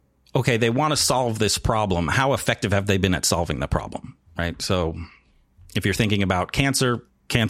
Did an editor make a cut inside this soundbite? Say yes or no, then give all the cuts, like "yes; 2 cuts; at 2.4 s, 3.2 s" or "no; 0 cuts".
no; 0 cuts